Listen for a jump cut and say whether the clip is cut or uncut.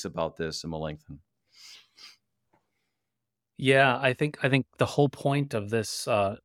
uncut